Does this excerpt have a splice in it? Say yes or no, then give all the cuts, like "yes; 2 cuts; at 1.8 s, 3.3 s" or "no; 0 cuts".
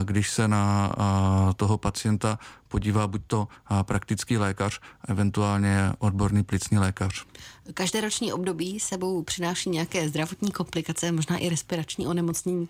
no; 0 cuts